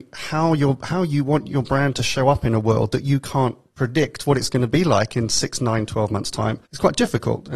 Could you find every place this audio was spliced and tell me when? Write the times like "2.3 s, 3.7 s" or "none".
6.7 s